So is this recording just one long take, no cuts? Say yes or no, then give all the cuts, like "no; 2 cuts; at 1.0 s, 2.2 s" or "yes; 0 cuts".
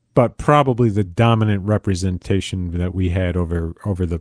yes; 0 cuts